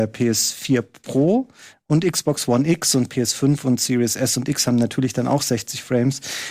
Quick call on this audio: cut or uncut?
uncut